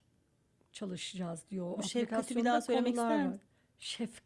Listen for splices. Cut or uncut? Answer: uncut